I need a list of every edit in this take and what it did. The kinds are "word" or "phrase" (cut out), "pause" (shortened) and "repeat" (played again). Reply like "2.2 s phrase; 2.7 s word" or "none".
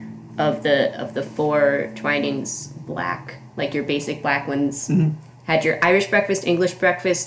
none